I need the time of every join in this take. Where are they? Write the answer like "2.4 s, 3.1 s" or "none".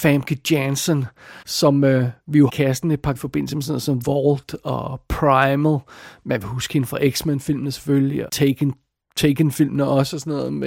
1.4 s, 2.5 s, 3.1 s, 4.0 s, 8.3 s